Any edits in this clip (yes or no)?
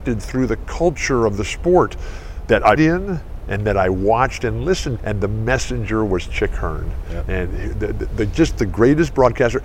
yes